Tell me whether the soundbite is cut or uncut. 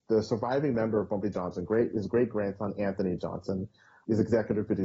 uncut